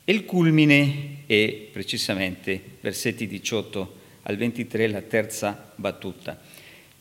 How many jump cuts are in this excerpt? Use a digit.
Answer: 0